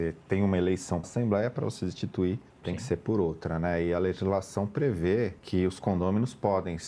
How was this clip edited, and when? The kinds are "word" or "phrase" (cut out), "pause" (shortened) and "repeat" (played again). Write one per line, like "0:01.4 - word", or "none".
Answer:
0:01.0 - phrase
0:02.5 - pause
0:05.4 - pause